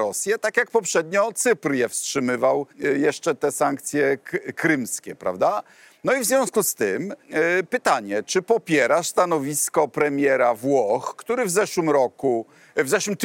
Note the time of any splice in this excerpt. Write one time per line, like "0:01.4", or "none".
0:02.7
0:07.2